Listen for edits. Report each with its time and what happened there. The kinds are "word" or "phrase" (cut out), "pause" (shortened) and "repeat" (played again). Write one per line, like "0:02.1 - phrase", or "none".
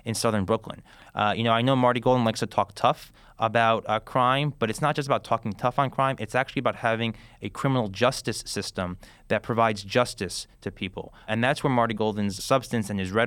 none